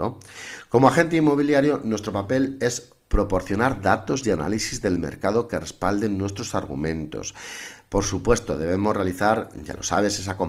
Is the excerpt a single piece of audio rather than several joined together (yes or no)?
yes